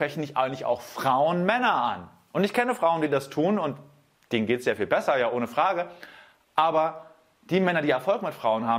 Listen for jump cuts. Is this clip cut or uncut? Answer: uncut